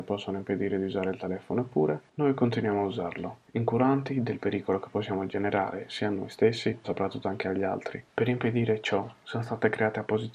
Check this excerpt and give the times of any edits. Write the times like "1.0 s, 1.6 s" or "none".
6.8 s